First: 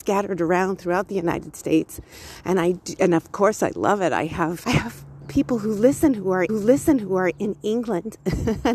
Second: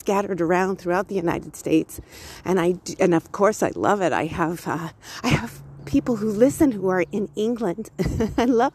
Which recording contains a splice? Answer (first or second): first